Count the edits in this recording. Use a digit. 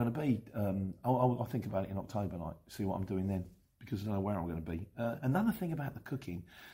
0